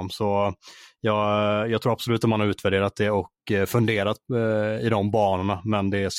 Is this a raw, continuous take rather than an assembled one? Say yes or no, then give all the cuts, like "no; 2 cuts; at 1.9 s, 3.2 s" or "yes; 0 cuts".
yes; 0 cuts